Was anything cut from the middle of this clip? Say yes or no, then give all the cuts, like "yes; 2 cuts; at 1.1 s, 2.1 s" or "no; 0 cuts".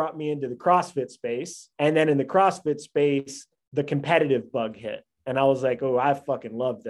yes; 1 cut; at 1.7 s